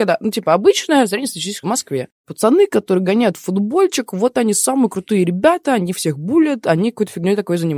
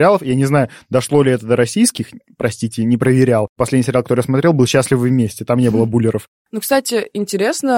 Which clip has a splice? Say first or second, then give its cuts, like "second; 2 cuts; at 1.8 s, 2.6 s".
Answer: first; 1 cut; at 1.6 s